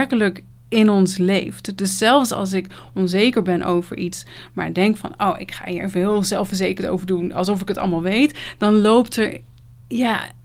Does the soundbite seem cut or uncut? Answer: uncut